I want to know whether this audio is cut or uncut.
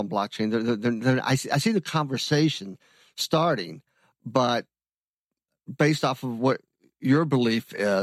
uncut